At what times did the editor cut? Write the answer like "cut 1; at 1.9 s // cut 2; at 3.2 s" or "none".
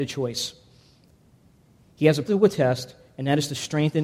cut 1; at 2.2 s